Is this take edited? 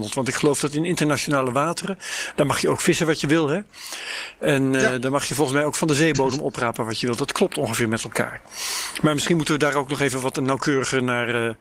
no; 0 cuts

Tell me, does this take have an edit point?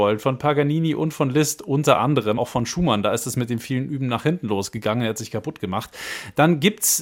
yes; 1 cut; at 2.4 s

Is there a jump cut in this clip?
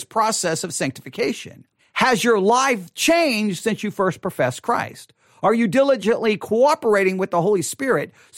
yes; 1 cut; at 1.8 s

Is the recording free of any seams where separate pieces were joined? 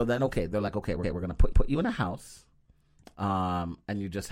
no; 2 cuts; at 1.0 s, 1.5 s

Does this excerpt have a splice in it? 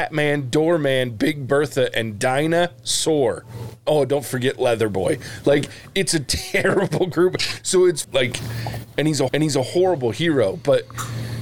yes; 2 cuts; at 8.0 s, 9.3 s

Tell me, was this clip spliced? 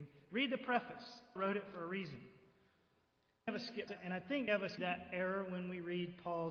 yes; 5 cuts; at 1.4 s, 3.5 s, 3.9 s, 4.5 s, 4.8 s

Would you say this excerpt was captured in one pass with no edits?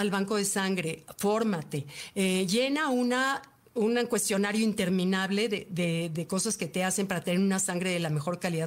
yes; 0 cuts

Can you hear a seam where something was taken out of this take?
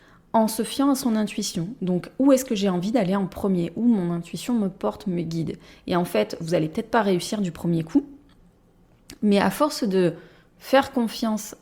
no; 0 cuts

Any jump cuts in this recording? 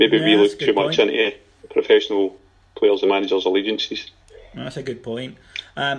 no; 0 cuts

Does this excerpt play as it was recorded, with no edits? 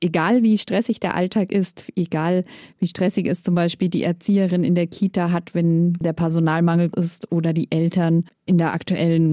no; 1 cut; at 6.9 s

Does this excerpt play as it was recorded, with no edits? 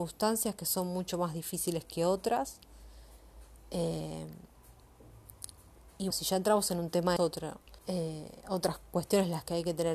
no; 3 cuts; at 6.1 s, 7.2 s, 7.8 s

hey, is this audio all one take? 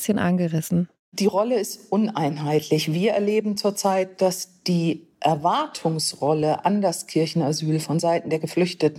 yes; 0 cuts

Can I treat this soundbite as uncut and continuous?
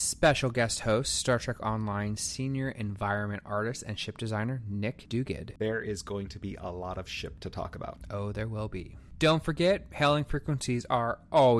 yes; 0 cuts

